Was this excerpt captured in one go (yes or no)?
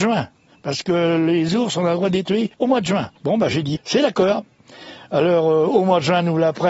no